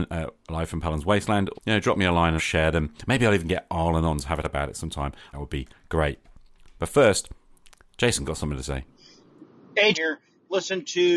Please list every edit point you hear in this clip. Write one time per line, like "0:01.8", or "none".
0:01.5
0:02.4
0:04.4
0:05.3
0:08.2
0:09.9